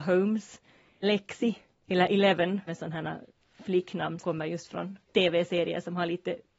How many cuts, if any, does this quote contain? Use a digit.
4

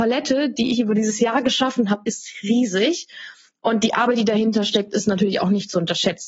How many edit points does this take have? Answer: 0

